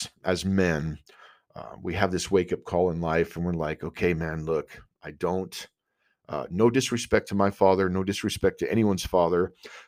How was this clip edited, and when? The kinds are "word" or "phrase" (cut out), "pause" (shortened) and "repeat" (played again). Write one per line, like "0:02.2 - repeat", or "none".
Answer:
none